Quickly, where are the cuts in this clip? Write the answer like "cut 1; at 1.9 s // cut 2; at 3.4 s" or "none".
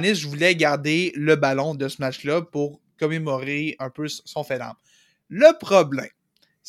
none

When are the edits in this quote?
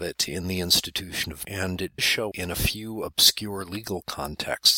cut 1; at 1.4 s // cut 2; at 2.0 s // cut 3; at 2.3 s

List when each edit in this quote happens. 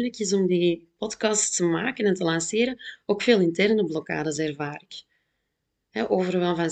none

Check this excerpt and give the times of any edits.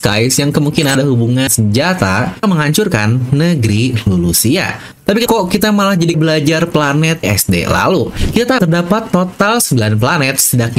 cut 1; at 0.9 s // cut 2; at 1.5 s // cut 3; at 2.4 s // cut 4; at 5.3 s // cut 5; at 6.1 s // cut 6; at 7.2 s // cut 7; at 8.6 s

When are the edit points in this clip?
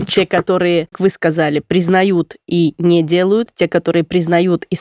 cut 1; at 0.9 s

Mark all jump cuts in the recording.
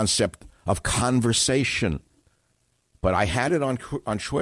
none

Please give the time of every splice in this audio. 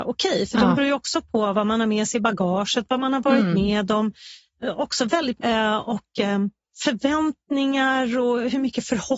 cut 1; at 5.4 s

